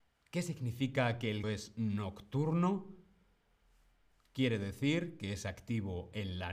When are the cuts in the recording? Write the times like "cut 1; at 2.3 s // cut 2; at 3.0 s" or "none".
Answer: cut 1; at 1.4 s